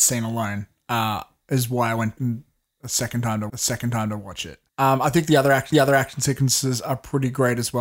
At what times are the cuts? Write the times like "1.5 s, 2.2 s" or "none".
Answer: 2.2 s, 3.5 s, 4.7 s, 5.7 s